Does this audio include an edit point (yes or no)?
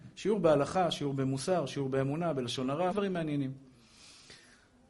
yes